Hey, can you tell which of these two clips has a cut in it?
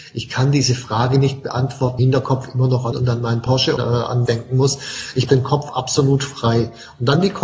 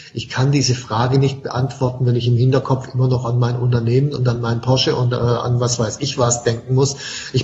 first; 5 cuts; at 2.0 s, 2.9 s, 3.8 s, 4.3 s, 5.3 s

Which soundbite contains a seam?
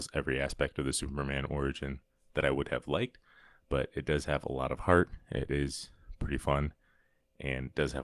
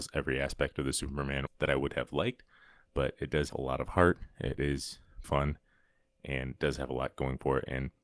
second; 3 cuts; at 1.5 s, 3.5 s, 5.2 s

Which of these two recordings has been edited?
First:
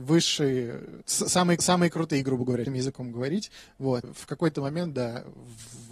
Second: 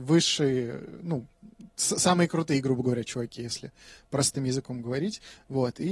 first; 4 cuts; at 1.0 s, 1.6 s, 2.7 s, 4.0 s

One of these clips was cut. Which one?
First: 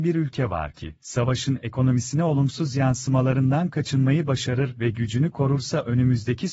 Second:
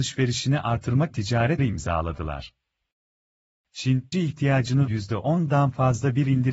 second; 4 cuts; at 1.1 s, 1.6 s, 4.1 s, 4.9 s

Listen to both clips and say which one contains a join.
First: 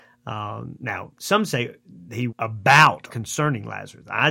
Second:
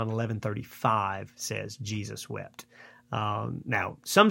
first; 2 cuts; at 2.3 s, 3.1 s

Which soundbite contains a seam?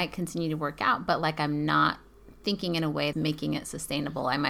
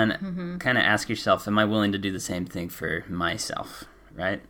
first; 1 cut; at 3.1 s

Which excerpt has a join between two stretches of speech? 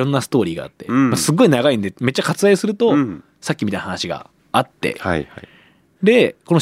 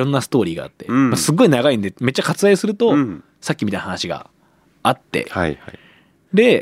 first; 1 cut; at 4.4 s

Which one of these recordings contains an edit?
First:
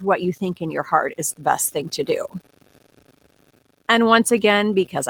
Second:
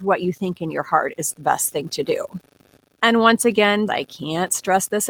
second; 2 cuts; at 2.8 s, 3.9 s

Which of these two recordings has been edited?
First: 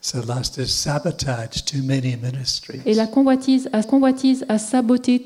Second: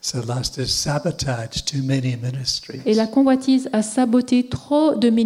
first; 1 cut; at 3.8 s

